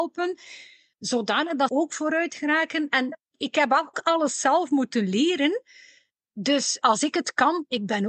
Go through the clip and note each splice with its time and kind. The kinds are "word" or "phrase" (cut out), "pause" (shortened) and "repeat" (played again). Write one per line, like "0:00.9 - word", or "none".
0:01.7 - word
0:03.3 - word
0:03.9 - word
0:06.8 - word